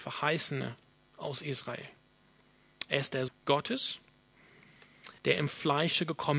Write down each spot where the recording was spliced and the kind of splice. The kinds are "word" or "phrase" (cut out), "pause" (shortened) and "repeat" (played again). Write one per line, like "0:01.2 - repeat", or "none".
0:03.3 - word
0:05.2 - pause

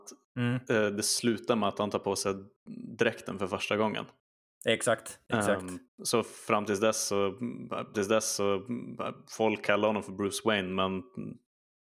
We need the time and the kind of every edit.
0:07.9 - repeat

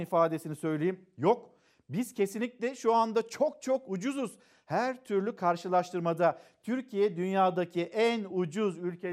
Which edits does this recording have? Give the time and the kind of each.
none

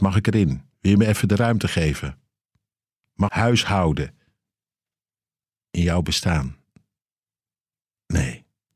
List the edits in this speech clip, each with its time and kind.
0:03.3 - phrase

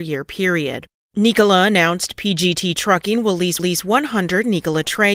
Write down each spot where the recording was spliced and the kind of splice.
0:01.0 - pause
0:03.6 - repeat

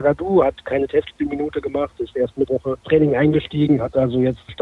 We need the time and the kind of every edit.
0:02.5 - word
0:02.8 - word

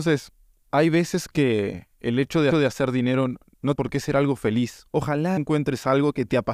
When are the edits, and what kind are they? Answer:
0:02.5 - repeat
0:03.8 - word
0:05.4 - phrase

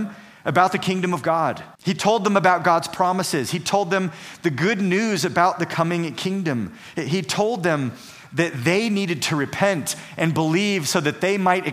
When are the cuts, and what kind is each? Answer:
0:01.7 - pause

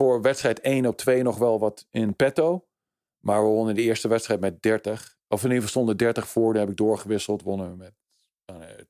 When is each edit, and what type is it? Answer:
none

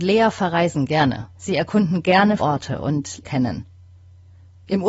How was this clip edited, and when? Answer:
0:01.3 - pause
0:02.4 - word
0:03.2 - phrase

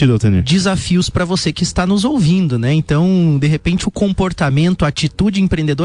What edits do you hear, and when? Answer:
none

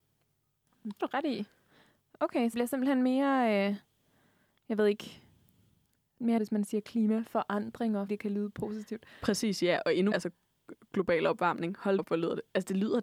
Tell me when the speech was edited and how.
0:01.0 - word
0:02.5 - word
0:06.4 - word
0:08.1 - word
0:10.1 - word
0:12.0 - word

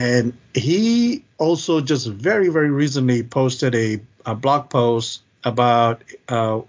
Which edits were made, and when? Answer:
none

